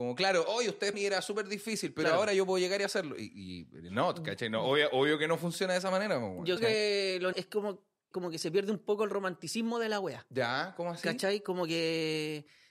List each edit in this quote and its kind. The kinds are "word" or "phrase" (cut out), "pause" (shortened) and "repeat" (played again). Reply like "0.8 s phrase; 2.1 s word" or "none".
0.9 s word; 6.6 s word; 7.3 s word; 8.1 s word